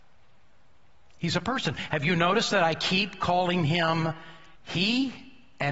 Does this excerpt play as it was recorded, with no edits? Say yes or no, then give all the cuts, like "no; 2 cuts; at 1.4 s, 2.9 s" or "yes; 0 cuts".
no; 1 cut; at 4.5 s